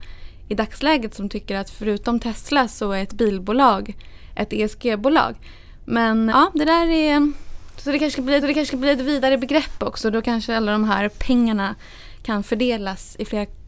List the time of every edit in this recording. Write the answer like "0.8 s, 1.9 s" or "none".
6.3 s, 8.4 s